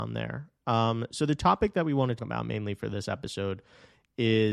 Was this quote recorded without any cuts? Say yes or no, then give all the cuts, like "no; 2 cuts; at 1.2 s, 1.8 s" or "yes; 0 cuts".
no; 1 cut; at 2.2 s